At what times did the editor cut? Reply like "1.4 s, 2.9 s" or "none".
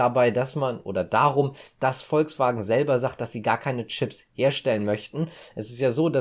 none